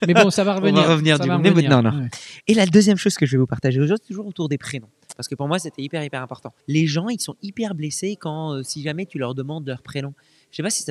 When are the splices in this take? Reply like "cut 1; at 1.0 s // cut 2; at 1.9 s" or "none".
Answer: cut 1; at 6.6 s

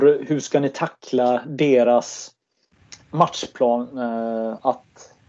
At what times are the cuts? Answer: cut 1; at 3.0 s

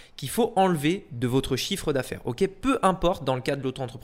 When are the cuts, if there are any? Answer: none

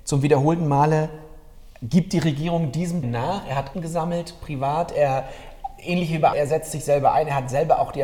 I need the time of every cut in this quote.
cut 1; at 3.0 s // cut 2; at 3.7 s // cut 3; at 6.3 s

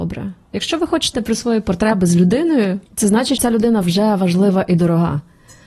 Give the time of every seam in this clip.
cut 1; at 1.1 s // cut 2; at 2.8 s // cut 3; at 3.4 s // cut 4; at 3.8 s

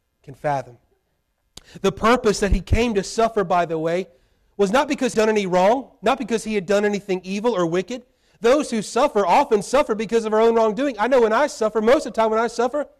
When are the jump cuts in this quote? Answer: cut 1; at 5.1 s

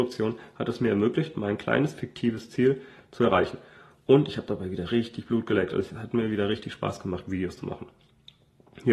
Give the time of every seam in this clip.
none

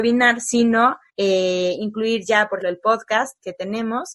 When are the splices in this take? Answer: cut 1; at 1.1 s // cut 2; at 2.6 s

